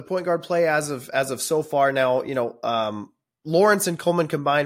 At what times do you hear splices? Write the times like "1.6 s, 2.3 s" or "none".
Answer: none